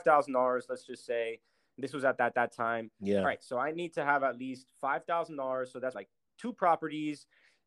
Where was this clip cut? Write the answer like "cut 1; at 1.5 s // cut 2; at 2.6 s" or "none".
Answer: cut 1; at 2.3 s // cut 2; at 5.9 s